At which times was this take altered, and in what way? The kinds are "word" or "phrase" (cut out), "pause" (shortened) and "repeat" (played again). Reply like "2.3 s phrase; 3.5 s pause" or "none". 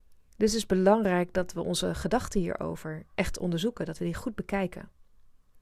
none